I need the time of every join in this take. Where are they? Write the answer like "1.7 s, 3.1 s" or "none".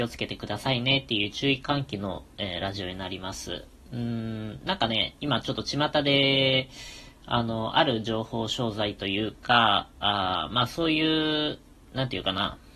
none